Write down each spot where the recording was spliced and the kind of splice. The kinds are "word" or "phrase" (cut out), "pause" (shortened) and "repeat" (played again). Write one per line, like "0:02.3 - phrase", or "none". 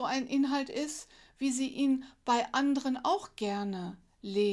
none